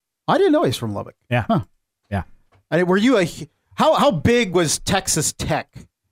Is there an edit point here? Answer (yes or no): no